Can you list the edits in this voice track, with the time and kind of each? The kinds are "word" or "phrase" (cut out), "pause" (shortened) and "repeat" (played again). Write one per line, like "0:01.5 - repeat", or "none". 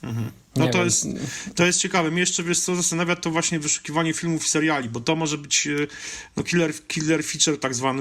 none